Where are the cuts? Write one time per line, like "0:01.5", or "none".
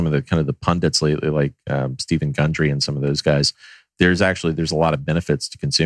none